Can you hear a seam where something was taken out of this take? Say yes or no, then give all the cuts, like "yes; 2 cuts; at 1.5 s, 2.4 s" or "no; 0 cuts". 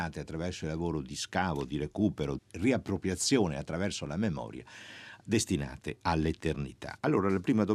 yes; 1 cut; at 2.4 s